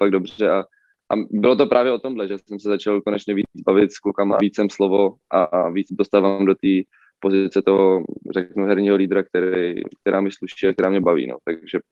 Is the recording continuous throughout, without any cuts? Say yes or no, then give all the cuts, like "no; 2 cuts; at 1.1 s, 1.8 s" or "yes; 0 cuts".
no; 3 cuts; at 4.4 s, 4.7 s, 5.9 s